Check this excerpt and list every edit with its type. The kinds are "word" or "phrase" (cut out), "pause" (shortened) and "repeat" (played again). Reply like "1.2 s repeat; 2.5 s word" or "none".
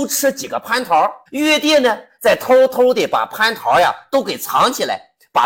1.3 s pause